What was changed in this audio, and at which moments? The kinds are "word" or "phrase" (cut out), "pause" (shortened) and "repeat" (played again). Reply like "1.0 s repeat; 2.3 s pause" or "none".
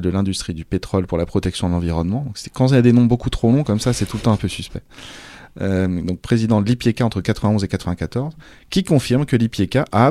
none